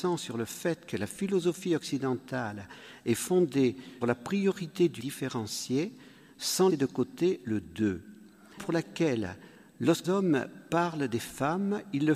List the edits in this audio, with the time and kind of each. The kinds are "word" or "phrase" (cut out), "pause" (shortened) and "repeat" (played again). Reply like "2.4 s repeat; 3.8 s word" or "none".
4.0 s word; 5.0 s word; 6.7 s word; 8.6 s word; 10.0 s word

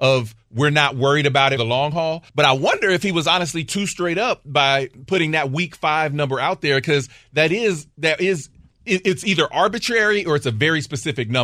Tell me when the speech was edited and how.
1.6 s phrase; 2.3 s pause

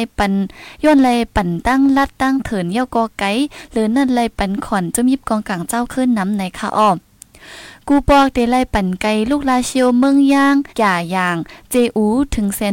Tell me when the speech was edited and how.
10.7 s pause

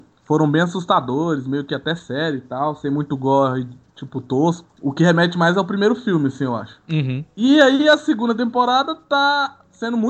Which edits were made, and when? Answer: none

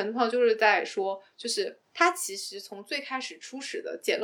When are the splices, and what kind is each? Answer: 1.8 s pause

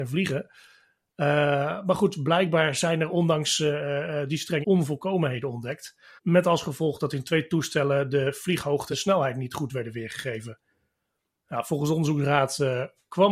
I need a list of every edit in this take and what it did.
4.6 s word; 6.2 s pause; 8.9 s word

